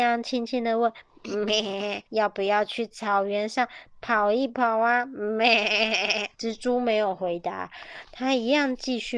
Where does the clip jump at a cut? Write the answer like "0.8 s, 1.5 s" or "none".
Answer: 2.1 s, 6.3 s